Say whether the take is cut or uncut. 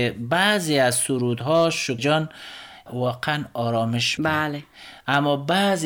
cut